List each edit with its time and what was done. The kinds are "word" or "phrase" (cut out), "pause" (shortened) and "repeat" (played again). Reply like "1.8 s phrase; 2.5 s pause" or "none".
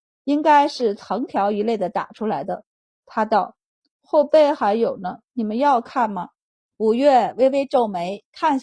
none

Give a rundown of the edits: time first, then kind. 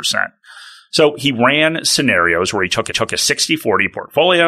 2.9 s repeat

